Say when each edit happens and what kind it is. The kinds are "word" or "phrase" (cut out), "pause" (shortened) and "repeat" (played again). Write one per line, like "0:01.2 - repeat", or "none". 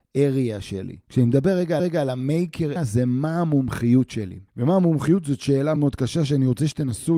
0:01.0 - pause
0:01.8 - repeat
0:02.8 - word
0:04.5 - pause
0:05.8 - word